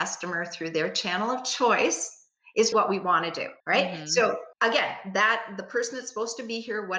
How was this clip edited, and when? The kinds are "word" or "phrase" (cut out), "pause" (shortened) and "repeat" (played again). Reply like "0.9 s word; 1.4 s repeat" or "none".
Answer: 2.7 s word; 3.6 s pause; 4.5 s pause